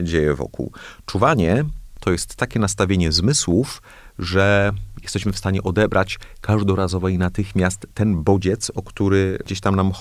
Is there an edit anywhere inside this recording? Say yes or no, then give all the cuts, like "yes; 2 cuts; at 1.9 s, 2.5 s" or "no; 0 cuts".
no; 0 cuts